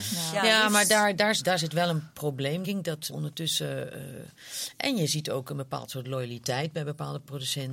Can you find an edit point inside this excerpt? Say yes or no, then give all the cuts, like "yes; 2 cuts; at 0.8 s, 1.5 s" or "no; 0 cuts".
yes; 3 cuts; at 1.4 s, 2.6 s, 3.1 s